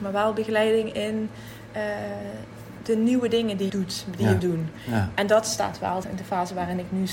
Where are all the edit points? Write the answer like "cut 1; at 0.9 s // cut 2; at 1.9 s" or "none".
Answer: cut 1; at 3.7 s // cut 2; at 4.4 s // cut 3; at 6.0 s